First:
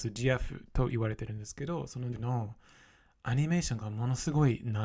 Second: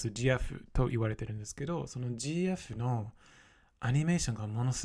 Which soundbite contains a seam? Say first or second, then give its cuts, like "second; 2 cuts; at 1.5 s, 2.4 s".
first; 1 cut; at 2.1 s